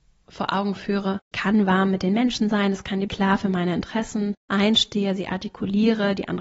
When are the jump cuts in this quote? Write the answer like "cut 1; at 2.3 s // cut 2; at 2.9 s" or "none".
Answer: cut 1; at 1.3 s // cut 2; at 3.1 s // cut 3; at 4.4 s